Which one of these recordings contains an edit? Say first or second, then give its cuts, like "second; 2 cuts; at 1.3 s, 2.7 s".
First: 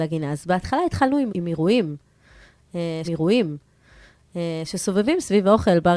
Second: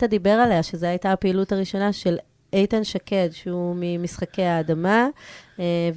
first; 2 cuts; at 1.3 s, 3.0 s